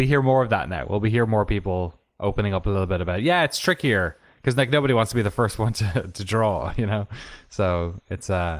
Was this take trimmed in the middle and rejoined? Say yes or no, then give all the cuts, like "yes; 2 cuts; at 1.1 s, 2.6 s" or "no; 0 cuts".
no; 0 cuts